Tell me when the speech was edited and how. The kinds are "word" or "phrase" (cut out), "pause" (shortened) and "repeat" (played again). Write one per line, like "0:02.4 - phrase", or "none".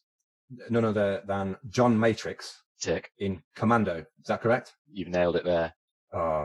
0:02.7 - pause
0:03.5 - pause